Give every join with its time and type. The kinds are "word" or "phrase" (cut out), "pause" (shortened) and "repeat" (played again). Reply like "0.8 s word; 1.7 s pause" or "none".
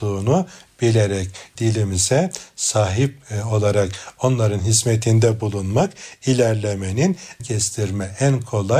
1.5 s word; 7.4 s word